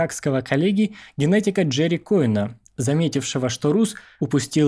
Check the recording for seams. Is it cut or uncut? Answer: uncut